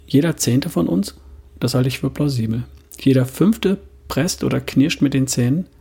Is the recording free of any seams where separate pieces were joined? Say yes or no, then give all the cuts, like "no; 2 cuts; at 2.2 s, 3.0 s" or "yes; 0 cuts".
no; 1 cut; at 1.5 s